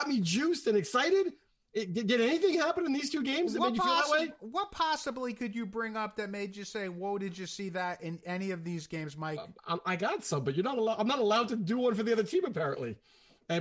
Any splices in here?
yes; 1 cut; at 9.6 s

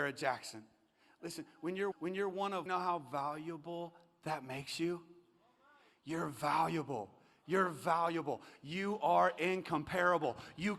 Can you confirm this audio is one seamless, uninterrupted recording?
no; 2 cuts; at 1.9 s, 2.7 s

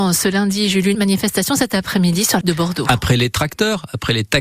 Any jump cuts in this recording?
yes; 2 cuts; at 0.9 s, 2.4 s

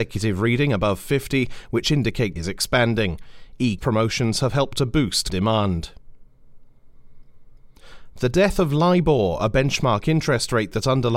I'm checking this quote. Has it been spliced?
yes; 3 cuts; at 2.4 s, 3.8 s, 5.3 s

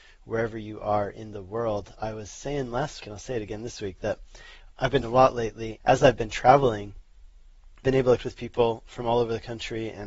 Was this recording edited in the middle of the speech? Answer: yes; 6 cuts; at 3.0 s, 4.7 s, 5.0 s, 5.8 s, 7.8 s, 8.2 s

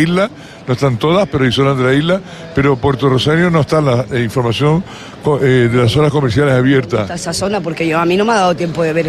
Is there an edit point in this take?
no; 0 cuts

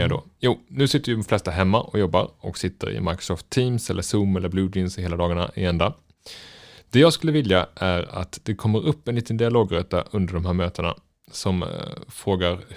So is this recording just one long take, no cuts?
yes; 0 cuts

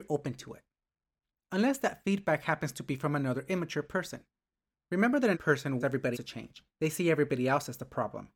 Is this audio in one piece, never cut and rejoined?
no; 3 cuts; at 5.3 s, 5.8 s, 6.1 s

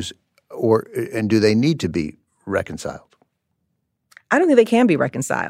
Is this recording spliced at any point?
no; 0 cuts

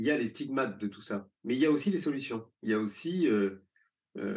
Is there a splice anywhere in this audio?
yes; 2 cuts; at 1.4 s, 2.6 s

